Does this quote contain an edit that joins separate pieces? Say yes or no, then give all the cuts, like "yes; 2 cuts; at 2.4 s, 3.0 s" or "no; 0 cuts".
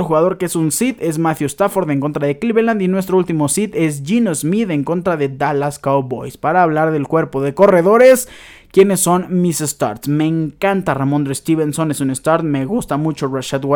no; 0 cuts